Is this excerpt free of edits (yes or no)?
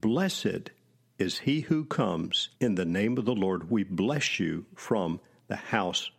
no